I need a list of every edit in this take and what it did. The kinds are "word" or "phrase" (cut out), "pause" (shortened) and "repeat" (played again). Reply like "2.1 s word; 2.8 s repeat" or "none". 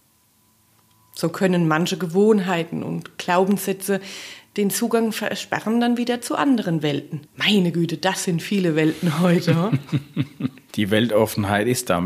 7.3 s pause